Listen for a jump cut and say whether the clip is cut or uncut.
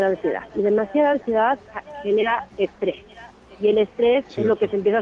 uncut